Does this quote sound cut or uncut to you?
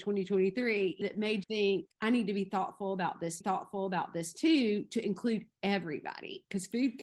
cut